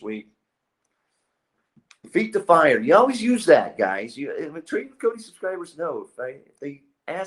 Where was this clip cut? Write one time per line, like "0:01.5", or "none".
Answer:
none